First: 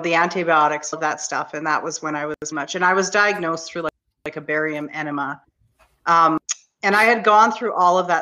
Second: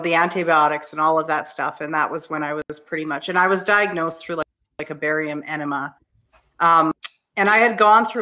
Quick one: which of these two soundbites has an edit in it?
first; 2 cuts; at 0.9 s, 2.5 s

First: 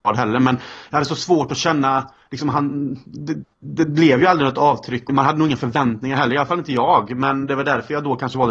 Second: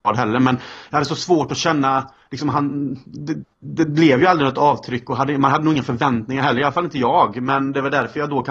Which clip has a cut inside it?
first; 1 cut; at 5.1 s

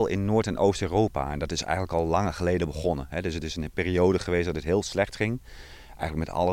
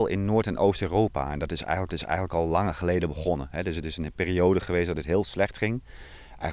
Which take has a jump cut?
second; 1 cut; at 1.9 s

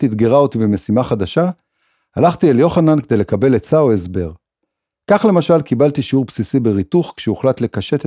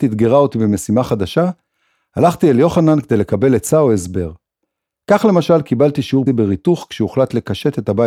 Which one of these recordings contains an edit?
second; 1 cut; at 6.3 s

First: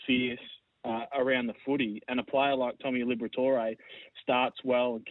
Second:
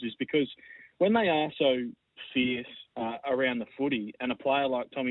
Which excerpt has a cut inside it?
second; 1 cut; at 2.9 s

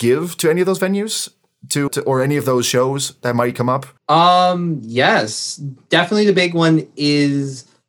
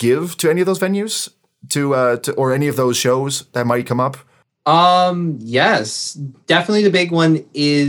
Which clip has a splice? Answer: first; 2 cuts; at 1.9 s, 4.0 s

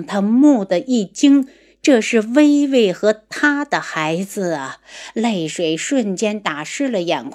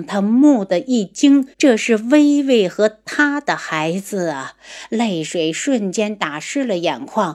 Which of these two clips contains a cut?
second; 1 cut; at 1.5 s

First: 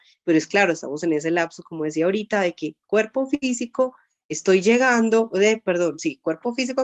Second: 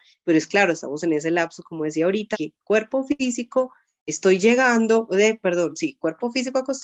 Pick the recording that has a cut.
second; 1 cut; at 2.3 s

